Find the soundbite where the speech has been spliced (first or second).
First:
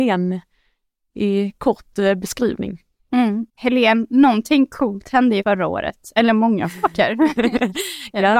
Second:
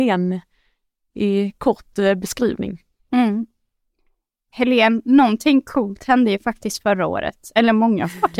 first